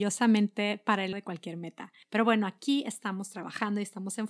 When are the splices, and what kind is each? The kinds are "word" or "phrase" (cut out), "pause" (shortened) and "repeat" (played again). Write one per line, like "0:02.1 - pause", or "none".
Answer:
0:01.1 - word
0:02.0 - pause

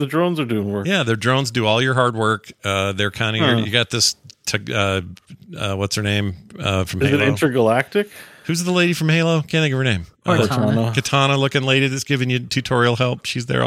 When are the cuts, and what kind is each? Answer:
0:10.2 - pause

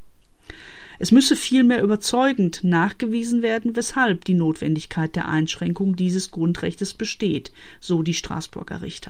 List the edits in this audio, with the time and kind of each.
none

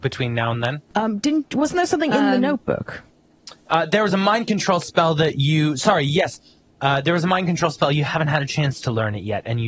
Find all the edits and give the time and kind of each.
none

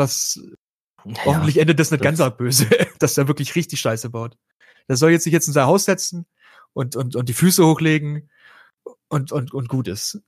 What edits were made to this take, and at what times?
none

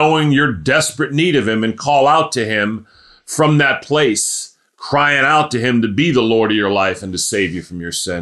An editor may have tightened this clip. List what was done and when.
none

